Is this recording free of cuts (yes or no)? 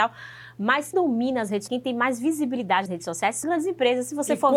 no